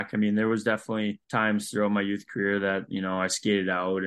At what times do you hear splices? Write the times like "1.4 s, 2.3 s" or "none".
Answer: 1.2 s